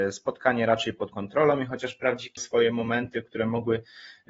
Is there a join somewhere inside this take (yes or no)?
yes